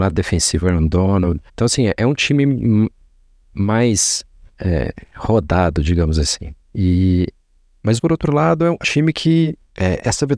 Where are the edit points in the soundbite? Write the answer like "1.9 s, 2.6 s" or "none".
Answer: 1.5 s, 6.6 s, 8.0 s, 8.8 s

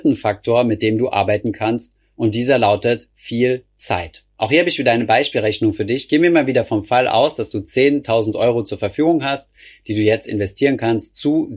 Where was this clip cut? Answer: none

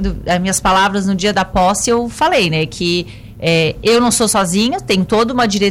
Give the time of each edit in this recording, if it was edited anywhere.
none

